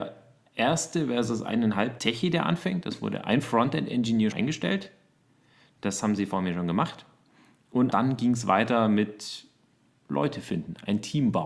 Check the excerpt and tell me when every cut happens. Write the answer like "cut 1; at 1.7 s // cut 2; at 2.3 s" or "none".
cut 1; at 2.0 s // cut 2; at 4.3 s // cut 3; at 7.9 s